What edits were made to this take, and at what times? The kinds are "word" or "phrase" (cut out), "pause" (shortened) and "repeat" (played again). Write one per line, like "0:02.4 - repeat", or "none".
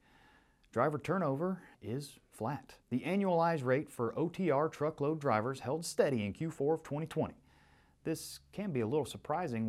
0:01.7 - pause
0:02.8 - pause

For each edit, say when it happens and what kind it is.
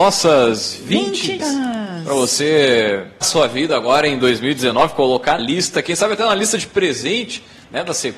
0:01.4 - word
0:03.2 - word
0:05.4 - word

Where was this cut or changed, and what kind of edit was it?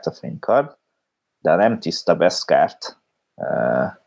none

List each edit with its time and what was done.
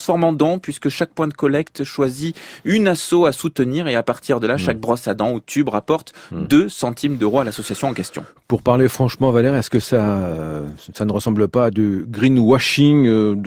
none

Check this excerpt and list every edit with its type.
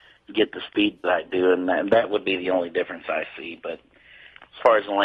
none

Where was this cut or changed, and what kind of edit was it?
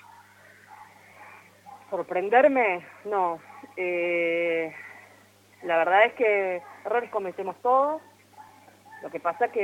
none

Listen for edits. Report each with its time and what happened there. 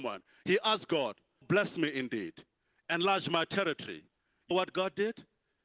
0:01.4 - word
0:04.5 - word

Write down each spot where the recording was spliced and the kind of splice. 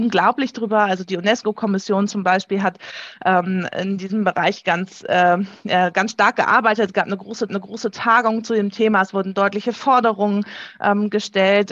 0:07.5 - repeat

